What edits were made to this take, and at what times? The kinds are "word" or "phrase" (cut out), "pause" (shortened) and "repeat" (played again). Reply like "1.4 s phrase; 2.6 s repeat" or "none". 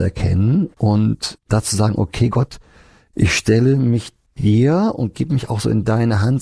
none